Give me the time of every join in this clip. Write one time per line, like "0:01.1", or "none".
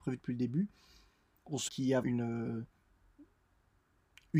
0:01.7
0:02.0